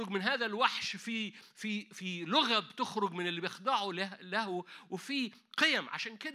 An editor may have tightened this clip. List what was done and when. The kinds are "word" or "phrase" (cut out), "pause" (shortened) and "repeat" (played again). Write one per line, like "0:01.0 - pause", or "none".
none